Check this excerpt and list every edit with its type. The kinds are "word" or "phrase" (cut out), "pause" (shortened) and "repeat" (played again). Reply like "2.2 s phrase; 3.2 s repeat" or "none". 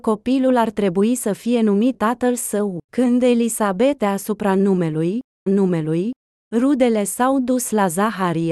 1.9 s word; 2.8 s pause; 4.0 s phrase; 5.5 s repeat